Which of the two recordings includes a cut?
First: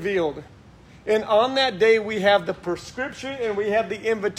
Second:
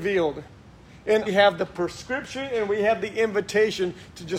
second; 1 cut; at 1.3 s

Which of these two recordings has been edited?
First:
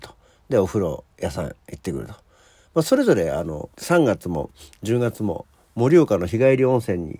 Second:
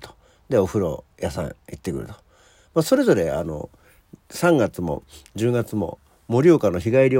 first; 1 cut; at 3.7 s

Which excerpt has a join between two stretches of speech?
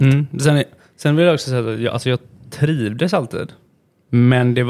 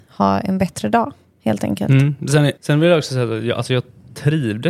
second; 1 cut; at 2.6 s

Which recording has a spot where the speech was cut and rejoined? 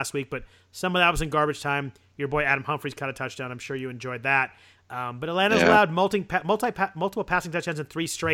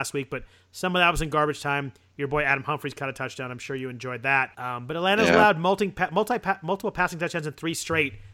second; 1 cut; at 4.5 s

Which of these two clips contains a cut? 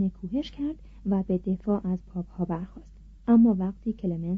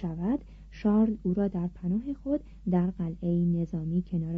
first; 1 cut; at 3.2 s

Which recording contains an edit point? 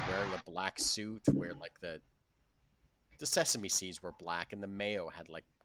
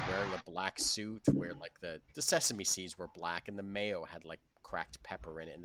second; 1 cut; at 2.1 s

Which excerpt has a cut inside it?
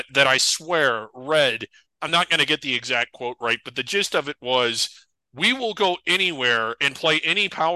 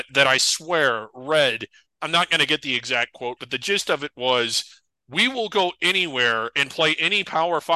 second; 1 cut; at 3.4 s

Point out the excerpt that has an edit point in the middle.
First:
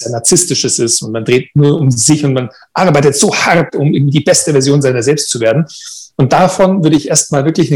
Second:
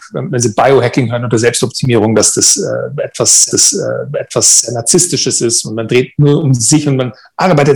second; 1 cut; at 3.5 s

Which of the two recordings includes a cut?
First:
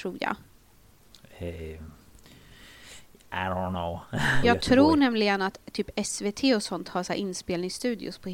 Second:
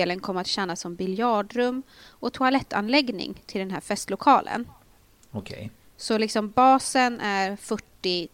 first; 1 cut; at 4.4 s

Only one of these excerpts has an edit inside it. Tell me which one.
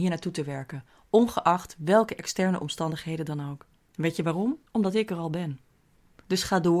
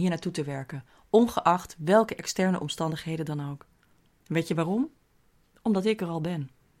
first; 2 cuts; at 3.7 s, 4.7 s

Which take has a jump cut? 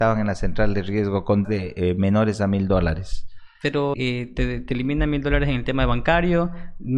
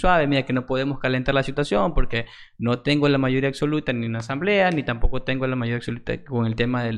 first; 2 cuts; at 1.4 s, 3.9 s

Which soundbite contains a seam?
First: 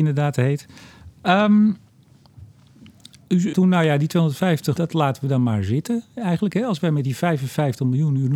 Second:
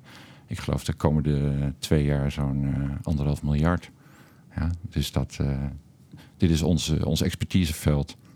first; 2 cuts; at 3.5 s, 4.8 s

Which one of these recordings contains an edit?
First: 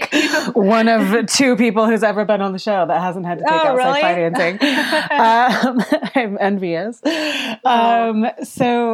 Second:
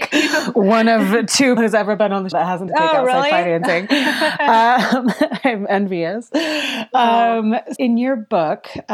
second; 4 cuts; at 1.6 s, 2.3 s, 2.7 s, 7.8 s

